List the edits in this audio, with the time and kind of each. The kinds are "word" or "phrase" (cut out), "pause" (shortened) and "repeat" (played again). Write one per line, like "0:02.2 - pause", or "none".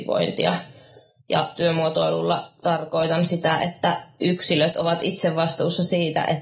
none